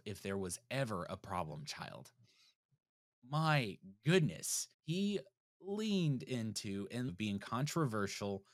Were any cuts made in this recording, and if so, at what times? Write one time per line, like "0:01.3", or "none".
0:04.7
0:07.1

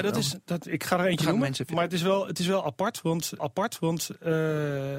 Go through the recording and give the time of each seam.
0:03.4

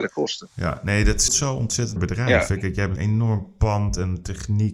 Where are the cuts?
0:01.3
0:02.0
0:03.0

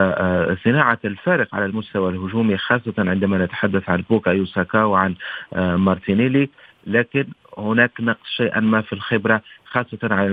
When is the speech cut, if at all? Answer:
none

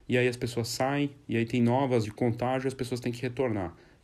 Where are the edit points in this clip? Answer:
0:02.0

